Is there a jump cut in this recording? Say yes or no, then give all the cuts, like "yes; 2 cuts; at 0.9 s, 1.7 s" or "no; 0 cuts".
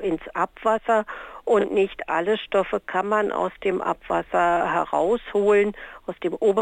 no; 0 cuts